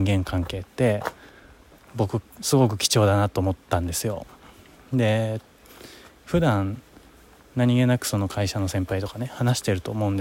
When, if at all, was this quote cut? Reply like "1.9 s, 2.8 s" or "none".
none